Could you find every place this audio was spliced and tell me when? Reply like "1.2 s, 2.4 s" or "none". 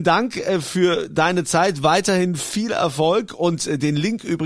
none